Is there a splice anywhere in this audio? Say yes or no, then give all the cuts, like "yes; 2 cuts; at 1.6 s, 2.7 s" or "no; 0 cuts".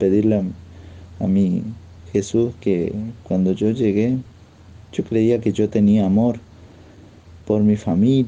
no; 0 cuts